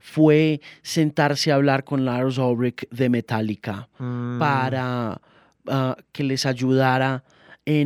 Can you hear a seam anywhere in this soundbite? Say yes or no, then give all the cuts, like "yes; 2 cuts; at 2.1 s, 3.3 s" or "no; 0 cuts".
no; 0 cuts